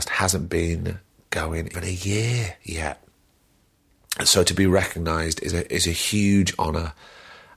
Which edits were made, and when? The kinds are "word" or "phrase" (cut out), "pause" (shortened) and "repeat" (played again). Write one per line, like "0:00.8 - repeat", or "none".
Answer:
0:01.7 - word